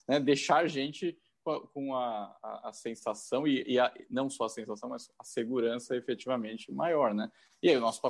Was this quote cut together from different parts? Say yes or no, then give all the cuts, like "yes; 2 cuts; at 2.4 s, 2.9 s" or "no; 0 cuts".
no; 0 cuts